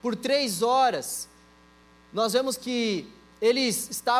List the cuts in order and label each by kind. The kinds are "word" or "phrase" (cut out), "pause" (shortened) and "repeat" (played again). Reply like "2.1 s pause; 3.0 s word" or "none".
1.8 s pause